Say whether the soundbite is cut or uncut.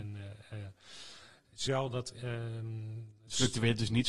cut